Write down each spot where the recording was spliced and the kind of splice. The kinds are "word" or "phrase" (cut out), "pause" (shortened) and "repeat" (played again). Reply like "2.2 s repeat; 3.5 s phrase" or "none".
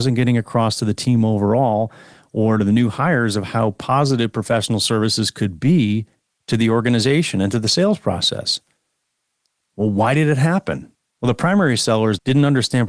none